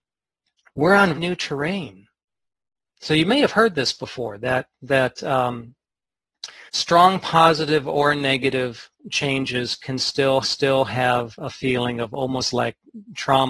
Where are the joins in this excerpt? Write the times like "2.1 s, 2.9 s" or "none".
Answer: 1.2 s, 6.7 s, 10.4 s

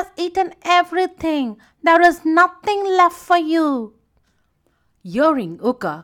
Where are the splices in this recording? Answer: none

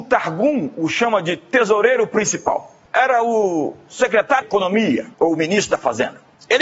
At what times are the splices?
4.4 s, 5.1 s

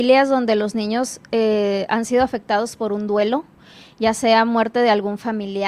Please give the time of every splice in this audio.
none

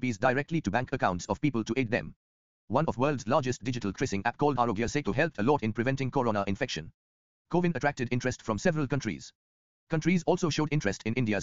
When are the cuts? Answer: 3.9 s

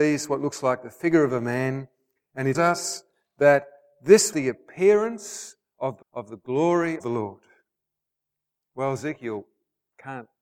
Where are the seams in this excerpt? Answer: 2.5 s, 4.3 s, 6.0 s, 7.0 s

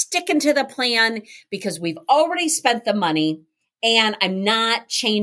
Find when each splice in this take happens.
none

